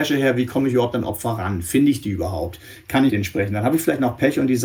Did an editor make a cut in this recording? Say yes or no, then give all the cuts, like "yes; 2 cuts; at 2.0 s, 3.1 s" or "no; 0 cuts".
yes; 1 cut; at 3.1 s